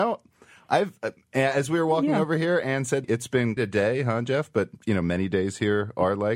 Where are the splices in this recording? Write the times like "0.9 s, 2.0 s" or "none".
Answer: 3.0 s, 3.6 s